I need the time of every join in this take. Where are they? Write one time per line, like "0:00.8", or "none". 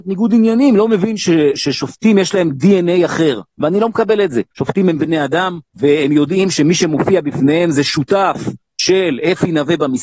0:04.5
0:05.7